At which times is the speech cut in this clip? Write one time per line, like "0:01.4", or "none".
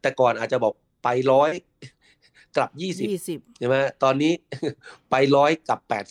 none